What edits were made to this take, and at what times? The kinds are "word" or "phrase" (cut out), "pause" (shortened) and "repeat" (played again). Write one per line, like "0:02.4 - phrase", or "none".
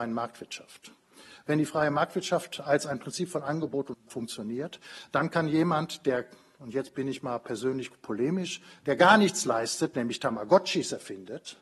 0:03.9 - word